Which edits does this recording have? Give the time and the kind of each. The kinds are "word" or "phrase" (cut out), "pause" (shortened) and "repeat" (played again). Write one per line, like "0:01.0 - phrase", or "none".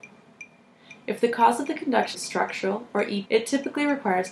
0:02.1 - word
0:03.2 - word